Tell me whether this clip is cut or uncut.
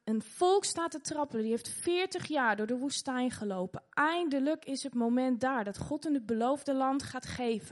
uncut